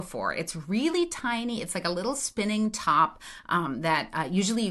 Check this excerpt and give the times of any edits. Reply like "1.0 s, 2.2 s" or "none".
none